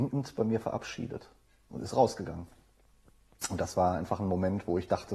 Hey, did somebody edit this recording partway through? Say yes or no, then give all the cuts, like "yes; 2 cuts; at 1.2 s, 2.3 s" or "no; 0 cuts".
no; 0 cuts